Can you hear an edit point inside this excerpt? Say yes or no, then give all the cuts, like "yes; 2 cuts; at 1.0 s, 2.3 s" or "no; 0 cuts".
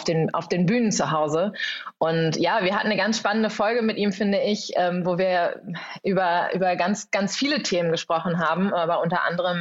no; 0 cuts